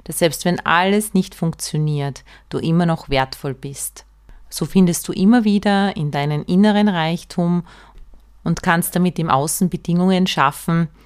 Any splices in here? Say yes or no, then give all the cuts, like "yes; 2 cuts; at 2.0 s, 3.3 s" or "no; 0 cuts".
no; 0 cuts